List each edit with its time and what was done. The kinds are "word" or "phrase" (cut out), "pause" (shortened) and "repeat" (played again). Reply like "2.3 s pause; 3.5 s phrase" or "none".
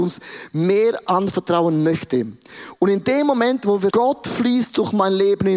3.9 s word